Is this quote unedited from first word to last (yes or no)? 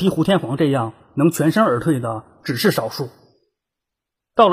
yes